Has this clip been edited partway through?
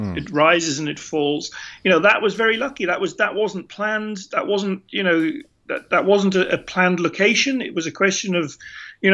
no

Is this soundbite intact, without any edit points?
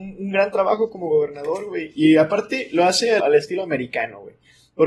no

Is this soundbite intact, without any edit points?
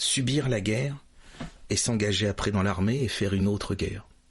yes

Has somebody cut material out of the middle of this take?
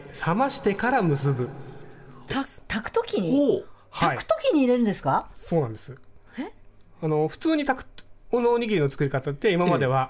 yes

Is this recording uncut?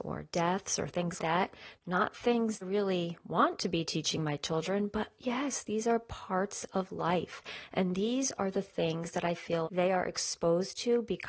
no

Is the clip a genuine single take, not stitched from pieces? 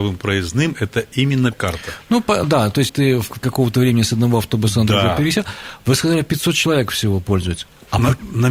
no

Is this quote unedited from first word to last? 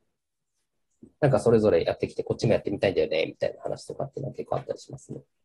no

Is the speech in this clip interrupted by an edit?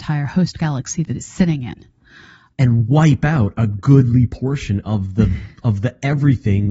no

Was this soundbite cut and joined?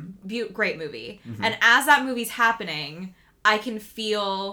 no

